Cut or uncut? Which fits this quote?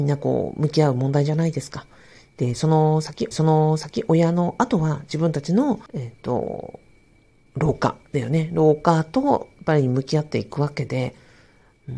cut